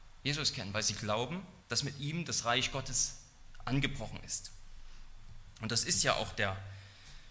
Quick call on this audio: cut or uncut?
cut